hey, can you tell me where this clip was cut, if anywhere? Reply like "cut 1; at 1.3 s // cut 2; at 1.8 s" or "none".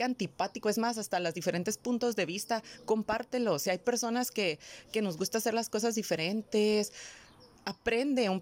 none